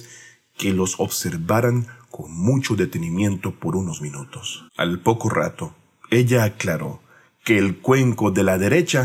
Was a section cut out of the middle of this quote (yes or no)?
yes